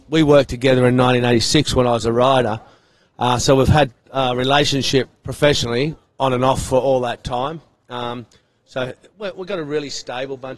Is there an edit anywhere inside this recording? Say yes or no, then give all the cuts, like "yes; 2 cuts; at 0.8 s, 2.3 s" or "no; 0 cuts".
no; 0 cuts